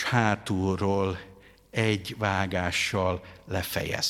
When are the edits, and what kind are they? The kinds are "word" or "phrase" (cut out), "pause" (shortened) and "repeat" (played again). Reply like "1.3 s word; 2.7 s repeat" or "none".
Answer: none

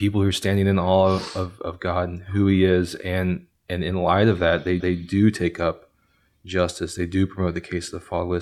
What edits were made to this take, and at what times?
4.8 s repeat

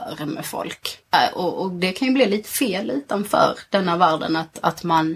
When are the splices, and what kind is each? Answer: 1.0 s pause

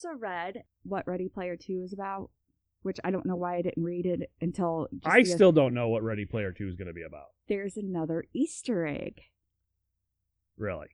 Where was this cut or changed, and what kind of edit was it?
none

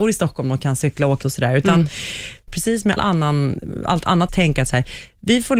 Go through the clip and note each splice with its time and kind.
1.2 s word; 2.5 s phrase; 3.0 s word; 4.3 s word

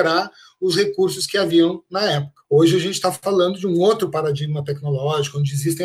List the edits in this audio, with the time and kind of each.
2.4 s pause

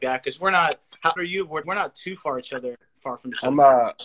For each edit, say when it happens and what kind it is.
1.2 s phrase; 1.6 s word

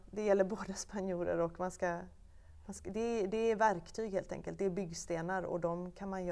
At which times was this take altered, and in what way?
none

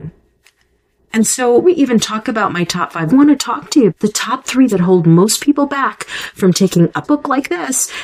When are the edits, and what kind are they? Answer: 1.6 s word; 3.1 s phrase; 3.9 s word; 4.7 s word; 7.0 s word

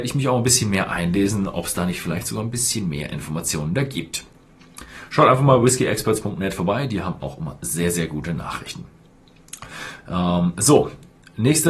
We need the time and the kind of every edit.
none

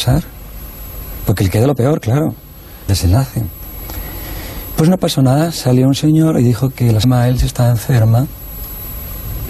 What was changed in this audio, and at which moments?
2.9 s word; 7.0 s word

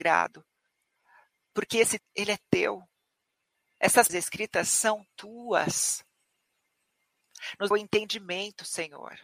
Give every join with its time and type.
2.0 s word; 4.1 s word; 7.7 s word

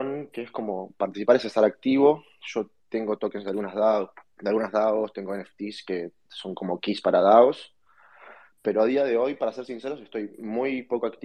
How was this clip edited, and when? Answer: none

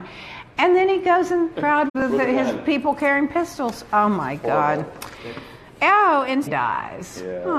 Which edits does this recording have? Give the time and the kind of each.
1.5 s phrase; 1.9 s word; 6.5 s phrase

